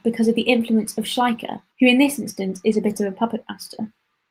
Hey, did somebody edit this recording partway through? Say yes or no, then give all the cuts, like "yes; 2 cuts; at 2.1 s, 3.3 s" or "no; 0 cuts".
yes; 1 cut; at 1.7 s